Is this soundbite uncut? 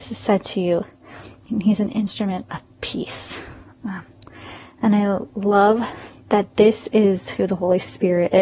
yes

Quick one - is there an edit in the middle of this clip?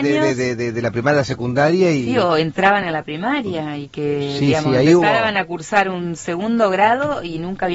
no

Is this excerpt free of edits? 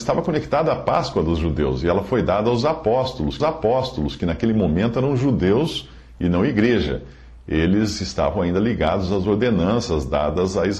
no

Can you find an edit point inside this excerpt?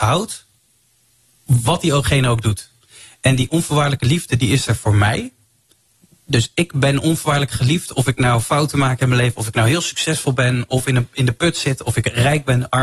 no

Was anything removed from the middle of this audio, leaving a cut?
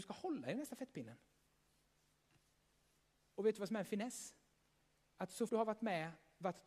yes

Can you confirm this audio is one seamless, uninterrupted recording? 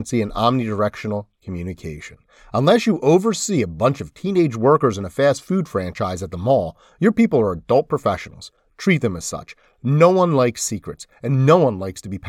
yes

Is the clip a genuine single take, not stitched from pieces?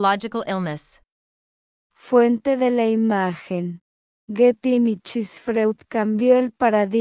yes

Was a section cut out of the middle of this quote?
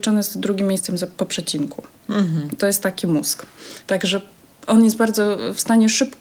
no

